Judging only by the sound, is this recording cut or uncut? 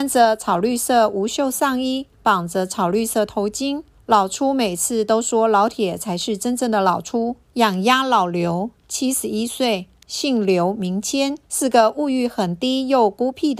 cut